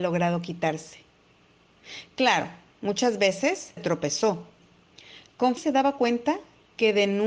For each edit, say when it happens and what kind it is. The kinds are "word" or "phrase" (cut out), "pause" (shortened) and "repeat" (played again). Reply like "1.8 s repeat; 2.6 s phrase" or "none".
3.8 s word; 5.6 s word